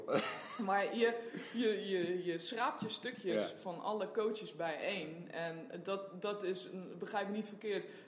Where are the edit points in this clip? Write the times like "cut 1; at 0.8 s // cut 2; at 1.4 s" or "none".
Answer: none